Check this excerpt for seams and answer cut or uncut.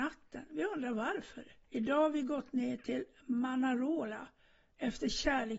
cut